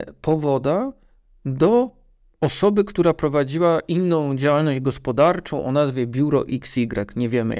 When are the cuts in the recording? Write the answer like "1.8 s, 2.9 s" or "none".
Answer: none